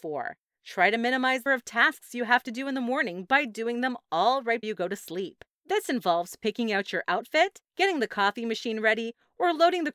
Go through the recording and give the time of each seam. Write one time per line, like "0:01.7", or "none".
0:01.5
0:04.6
0:05.5
0:07.7